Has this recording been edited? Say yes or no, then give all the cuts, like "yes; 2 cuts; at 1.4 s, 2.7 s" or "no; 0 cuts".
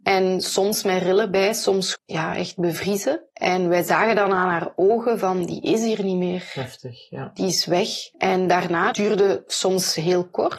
yes; 4 cuts; at 1.9 s, 3.3 s, 8.1 s, 8.9 s